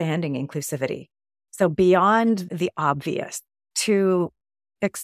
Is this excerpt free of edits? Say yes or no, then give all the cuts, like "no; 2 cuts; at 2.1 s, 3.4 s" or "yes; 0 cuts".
no; 1 cut; at 2.5 s